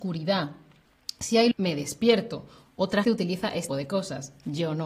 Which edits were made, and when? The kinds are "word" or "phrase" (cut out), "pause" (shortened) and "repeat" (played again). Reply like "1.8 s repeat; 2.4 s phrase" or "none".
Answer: 1.5 s word; 3.0 s word; 3.7 s word